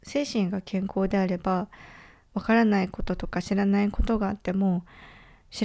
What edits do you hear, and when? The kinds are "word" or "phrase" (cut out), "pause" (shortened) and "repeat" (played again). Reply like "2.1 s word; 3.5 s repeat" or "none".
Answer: none